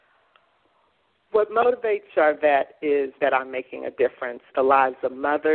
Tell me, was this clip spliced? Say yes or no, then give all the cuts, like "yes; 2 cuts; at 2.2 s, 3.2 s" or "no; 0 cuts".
yes; 3 cuts; at 2.1 s, 3.2 s, 4.5 s